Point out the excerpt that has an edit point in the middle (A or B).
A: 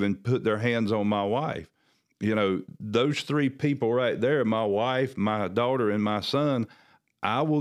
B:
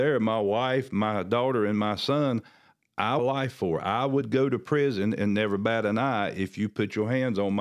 B